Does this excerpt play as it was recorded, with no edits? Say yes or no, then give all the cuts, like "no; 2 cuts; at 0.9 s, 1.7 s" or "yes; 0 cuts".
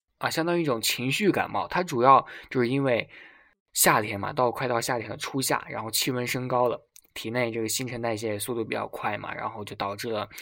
yes; 0 cuts